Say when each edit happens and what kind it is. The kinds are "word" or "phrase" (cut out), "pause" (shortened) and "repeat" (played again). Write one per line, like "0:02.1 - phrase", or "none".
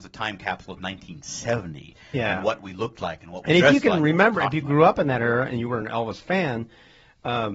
none